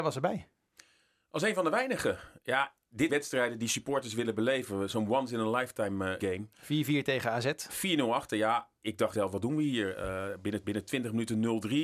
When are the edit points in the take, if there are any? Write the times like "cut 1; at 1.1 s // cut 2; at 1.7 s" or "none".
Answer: cut 1; at 3.1 s // cut 2; at 6.2 s // cut 3; at 9.1 s // cut 4; at 10.6 s